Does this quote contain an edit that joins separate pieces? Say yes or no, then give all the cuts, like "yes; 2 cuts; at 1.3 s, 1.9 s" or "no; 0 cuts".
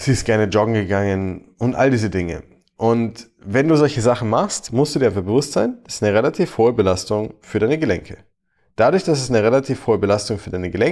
no; 0 cuts